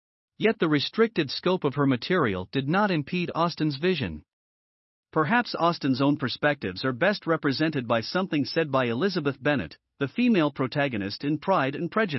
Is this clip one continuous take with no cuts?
yes; 0 cuts

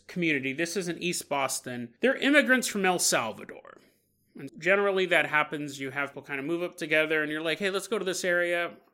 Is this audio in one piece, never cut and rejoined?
no; 3 cuts; at 2.0 s, 4.5 s, 6.1 s

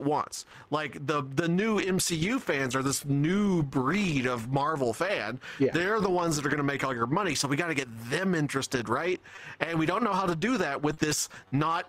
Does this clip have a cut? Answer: no; 0 cuts

